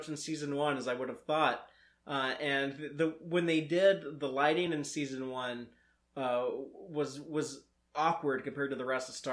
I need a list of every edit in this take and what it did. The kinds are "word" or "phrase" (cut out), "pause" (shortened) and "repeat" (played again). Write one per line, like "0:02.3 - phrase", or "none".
none